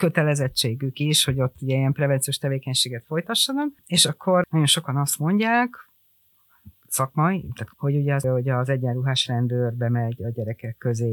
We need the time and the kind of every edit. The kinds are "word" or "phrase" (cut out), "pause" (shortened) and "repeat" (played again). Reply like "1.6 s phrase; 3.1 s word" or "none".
3.8 s pause; 7.7 s word; 8.2 s phrase